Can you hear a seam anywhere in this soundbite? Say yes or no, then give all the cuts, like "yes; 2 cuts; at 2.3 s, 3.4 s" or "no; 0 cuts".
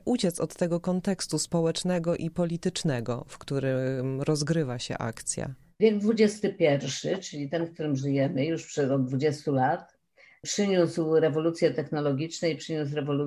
no; 0 cuts